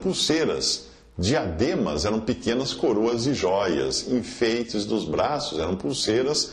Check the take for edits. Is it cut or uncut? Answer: uncut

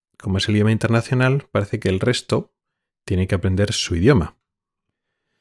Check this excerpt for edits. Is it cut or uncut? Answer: uncut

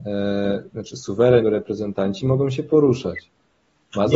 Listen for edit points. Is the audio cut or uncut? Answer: cut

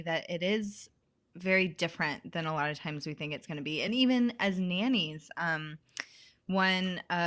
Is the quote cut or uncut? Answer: uncut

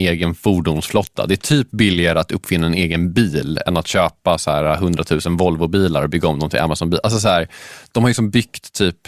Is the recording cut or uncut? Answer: uncut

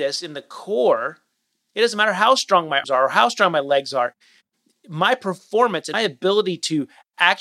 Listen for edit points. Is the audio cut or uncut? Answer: cut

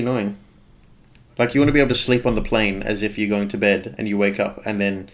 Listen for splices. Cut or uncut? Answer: uncut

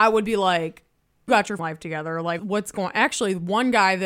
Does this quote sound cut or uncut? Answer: cut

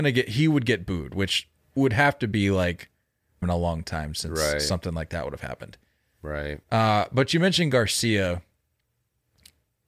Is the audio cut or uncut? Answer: cut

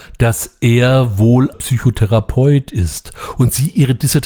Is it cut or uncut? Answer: cut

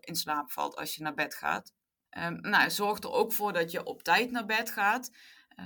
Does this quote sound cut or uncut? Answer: uncut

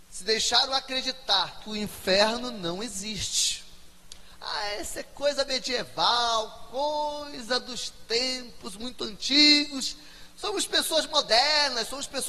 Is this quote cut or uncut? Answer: uncut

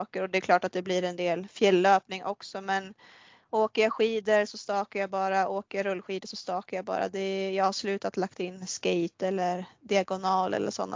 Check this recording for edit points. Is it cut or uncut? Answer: uncut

